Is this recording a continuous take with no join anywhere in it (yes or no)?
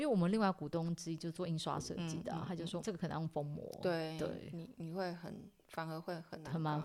no